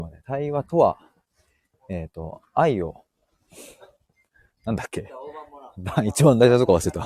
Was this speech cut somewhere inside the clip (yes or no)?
no